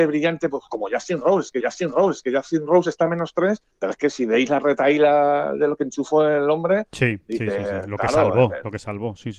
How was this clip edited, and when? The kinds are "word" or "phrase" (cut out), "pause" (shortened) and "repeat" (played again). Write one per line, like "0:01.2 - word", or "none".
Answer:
0:01.6 - repeat
0:03.7 - pause